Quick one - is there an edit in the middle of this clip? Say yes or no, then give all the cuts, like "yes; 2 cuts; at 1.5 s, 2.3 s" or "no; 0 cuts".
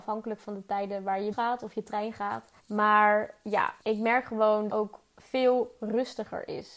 yes; 4 cuts; at 1.3 s, 2.6 s, 3.8 s, 4.7 s